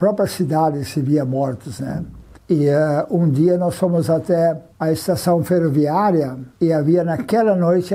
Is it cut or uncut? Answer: cut